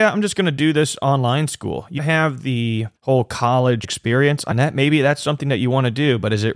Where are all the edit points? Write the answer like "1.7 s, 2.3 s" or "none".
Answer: 2.0 s, 3.0 s, 3.8 s, 4.5 s